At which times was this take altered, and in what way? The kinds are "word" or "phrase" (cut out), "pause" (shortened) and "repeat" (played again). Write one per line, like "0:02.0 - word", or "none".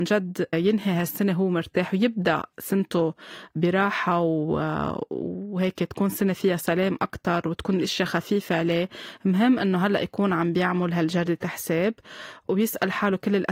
none